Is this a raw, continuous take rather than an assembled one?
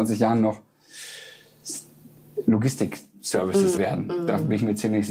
no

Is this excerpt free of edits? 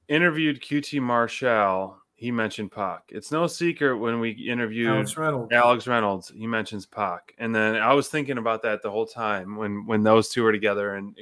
yes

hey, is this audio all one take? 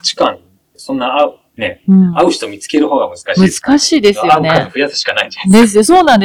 yes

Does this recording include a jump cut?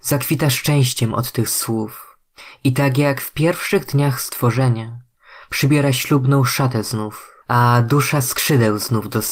yes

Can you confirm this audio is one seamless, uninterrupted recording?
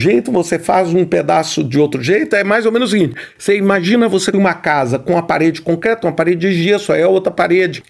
no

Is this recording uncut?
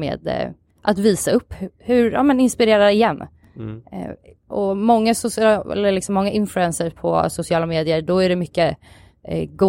yes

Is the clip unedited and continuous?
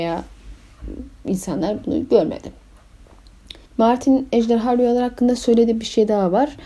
no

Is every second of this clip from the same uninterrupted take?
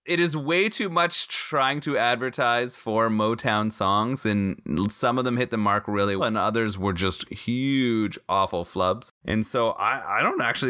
no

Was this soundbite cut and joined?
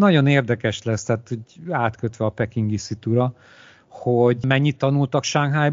no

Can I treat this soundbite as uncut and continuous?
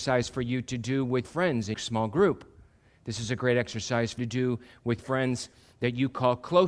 no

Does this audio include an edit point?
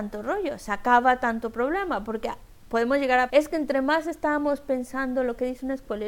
yes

